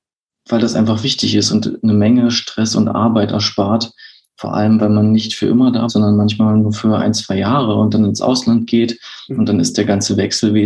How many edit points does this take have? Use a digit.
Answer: 1